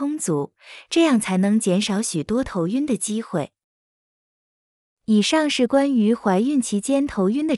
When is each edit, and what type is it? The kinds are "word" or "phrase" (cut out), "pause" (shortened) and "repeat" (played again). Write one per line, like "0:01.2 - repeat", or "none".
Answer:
none